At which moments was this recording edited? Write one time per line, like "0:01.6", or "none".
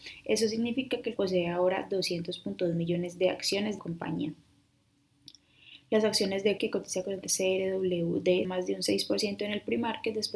0:01.2
0:03.8
0:06.6
0:07.2
0:08.4